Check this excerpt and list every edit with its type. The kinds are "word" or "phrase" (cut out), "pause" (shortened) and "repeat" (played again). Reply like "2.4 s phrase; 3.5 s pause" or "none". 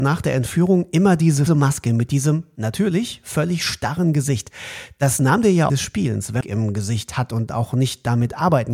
1.5 s word; 5.7 s phrase; 6.4 s phrase